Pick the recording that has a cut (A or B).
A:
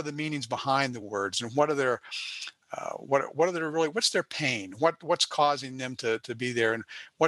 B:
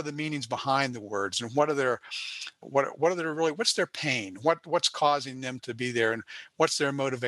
B